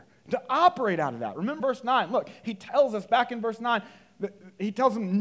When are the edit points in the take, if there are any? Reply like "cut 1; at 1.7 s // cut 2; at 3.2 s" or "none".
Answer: cut 1; at 1.6 s